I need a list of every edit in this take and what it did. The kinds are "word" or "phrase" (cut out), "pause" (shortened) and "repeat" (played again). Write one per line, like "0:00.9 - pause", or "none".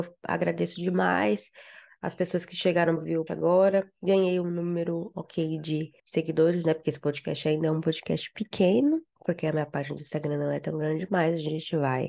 0:03.0 - word
0:03.3 - word
0:06.0 - pause
0:09.1 - pause